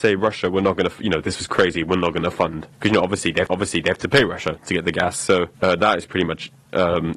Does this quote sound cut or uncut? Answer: cut